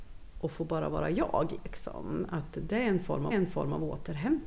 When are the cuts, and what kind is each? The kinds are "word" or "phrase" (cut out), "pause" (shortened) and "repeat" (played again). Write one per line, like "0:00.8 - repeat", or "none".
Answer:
0:03.3 - repeat